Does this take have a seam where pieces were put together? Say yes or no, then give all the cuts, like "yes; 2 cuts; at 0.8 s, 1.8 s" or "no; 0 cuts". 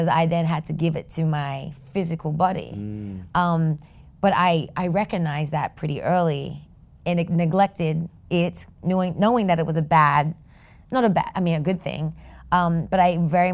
yes; 1 cut; at 8.2 s